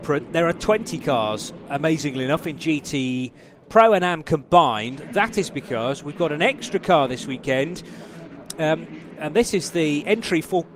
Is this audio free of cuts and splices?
no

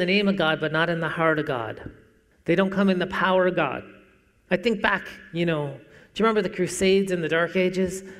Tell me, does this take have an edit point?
no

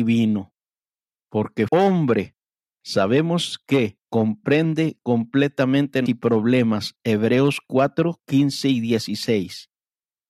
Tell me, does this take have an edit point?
yes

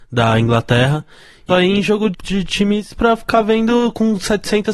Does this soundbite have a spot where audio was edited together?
yes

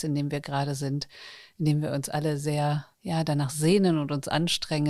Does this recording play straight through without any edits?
no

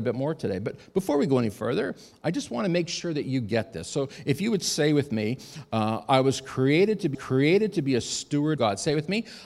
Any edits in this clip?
yes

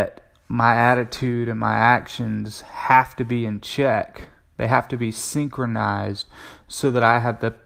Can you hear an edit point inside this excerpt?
no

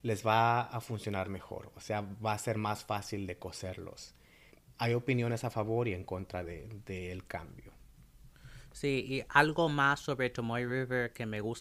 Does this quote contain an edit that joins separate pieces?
no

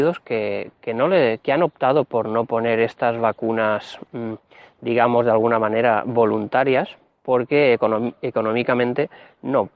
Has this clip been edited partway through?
no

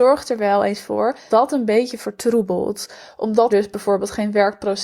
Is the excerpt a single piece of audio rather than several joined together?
no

